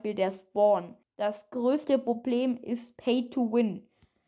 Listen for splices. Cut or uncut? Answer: cut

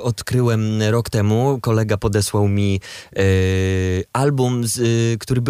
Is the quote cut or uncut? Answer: uncut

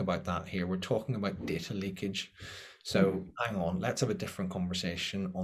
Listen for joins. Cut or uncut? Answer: uncut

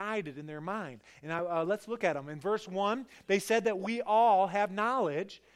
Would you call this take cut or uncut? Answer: uncut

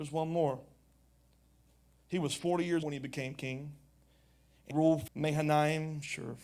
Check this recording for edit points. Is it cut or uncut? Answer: cut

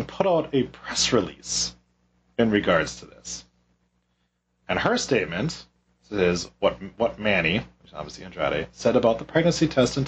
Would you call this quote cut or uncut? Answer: uncut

